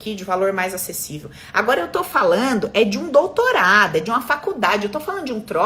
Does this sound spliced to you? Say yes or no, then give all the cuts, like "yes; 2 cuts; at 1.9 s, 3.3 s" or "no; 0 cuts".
no; 0 cuts